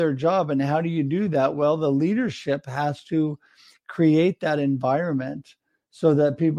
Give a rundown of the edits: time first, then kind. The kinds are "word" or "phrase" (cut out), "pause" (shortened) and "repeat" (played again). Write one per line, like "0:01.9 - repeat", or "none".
none